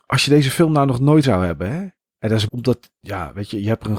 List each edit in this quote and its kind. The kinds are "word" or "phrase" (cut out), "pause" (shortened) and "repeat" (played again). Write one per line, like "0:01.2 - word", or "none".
0:01.2 - word
0:02.5 - word